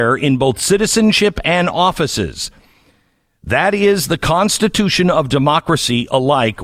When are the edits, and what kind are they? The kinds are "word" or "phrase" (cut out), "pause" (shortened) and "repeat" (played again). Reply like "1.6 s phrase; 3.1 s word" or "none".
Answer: none

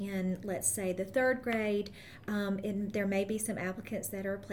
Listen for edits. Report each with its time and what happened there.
none

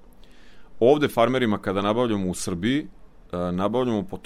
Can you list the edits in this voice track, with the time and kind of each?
none

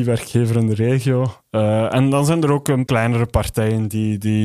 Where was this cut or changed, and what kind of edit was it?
2.9 s word

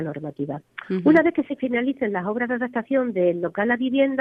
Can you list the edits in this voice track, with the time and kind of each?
none

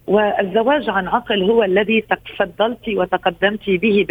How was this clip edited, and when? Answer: none

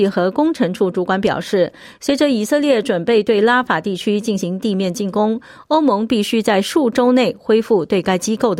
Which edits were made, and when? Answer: none

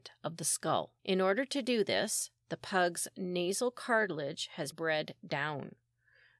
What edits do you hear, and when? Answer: 1.0 s pause; 4.7 s word

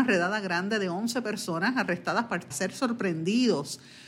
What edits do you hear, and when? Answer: 2.5 s word

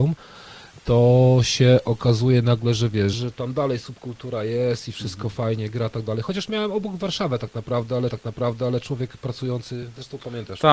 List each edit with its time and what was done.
3.1 s word; 8.1 s repeat

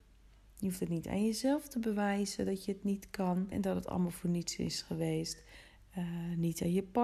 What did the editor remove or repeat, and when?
3.5 s word

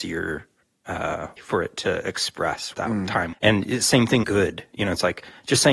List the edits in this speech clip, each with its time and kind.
1.4 s word; 2.7 s word; 3.3 s word; 4.2 s word

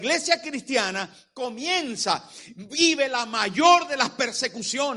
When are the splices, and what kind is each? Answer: none

